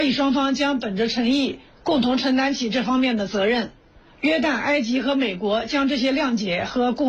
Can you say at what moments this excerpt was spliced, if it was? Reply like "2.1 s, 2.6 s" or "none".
none